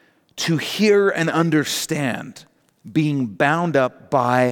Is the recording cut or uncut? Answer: uncut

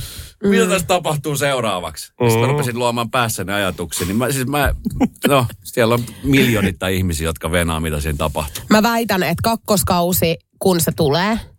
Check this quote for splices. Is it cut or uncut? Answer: uncut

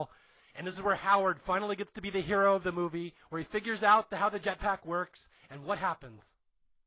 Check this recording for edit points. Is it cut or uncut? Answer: uncut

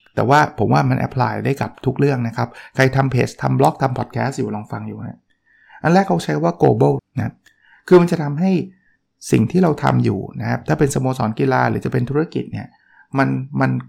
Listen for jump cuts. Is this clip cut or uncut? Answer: cut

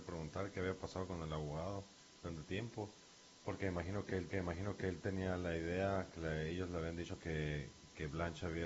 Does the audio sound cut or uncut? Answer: cut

